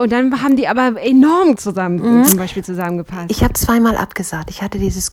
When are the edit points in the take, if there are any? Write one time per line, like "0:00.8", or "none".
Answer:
0:01.5